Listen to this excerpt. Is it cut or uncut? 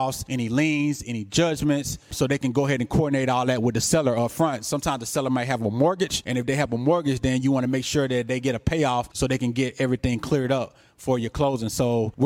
uncut